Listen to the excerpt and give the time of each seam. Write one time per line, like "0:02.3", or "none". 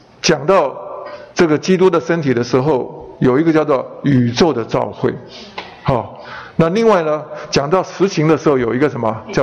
0:01.3